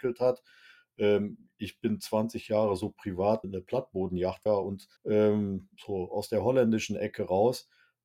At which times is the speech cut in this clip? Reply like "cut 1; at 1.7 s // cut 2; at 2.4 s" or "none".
cut 1; at 3.4 s // cut 2; at 4.5 s // cut 3; at 5.0 s